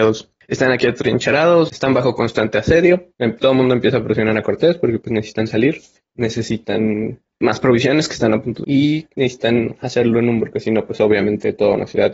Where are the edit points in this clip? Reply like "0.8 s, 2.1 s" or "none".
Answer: 3.1 s, 7.4 s, 8.6 s, 10.4 s